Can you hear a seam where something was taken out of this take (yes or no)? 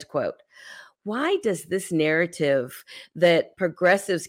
no